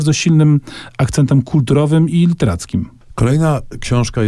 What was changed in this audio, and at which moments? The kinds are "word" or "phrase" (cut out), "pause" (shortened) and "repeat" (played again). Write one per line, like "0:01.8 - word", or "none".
none